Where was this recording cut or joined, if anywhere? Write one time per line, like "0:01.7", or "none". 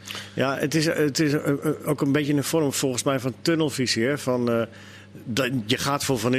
none